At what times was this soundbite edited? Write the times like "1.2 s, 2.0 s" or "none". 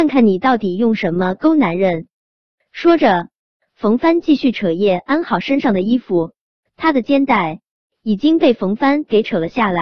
none